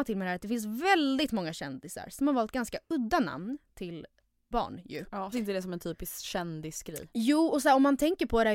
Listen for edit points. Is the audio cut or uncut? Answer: cut